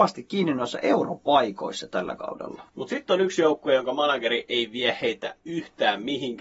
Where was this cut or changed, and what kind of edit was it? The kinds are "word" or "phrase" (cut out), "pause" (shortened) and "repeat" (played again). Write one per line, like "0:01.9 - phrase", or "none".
0:02.7 - pause